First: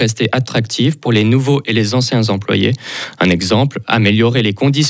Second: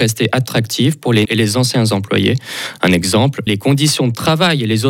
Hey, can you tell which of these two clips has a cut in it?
second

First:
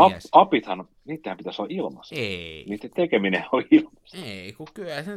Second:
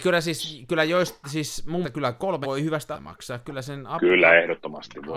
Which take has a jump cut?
second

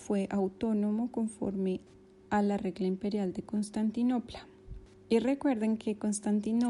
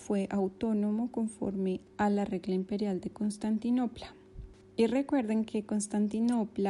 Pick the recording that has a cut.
second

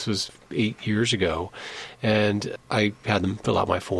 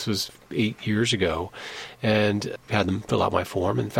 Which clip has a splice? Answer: second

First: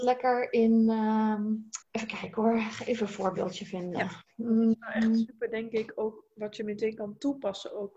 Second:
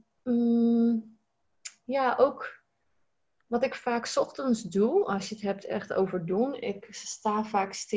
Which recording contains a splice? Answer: first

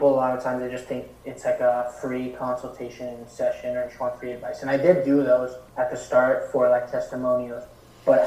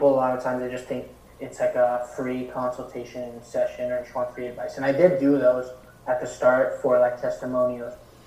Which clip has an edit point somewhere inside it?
first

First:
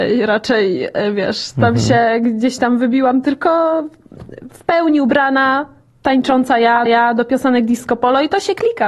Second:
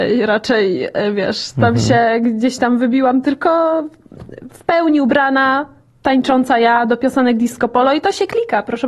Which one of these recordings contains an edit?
first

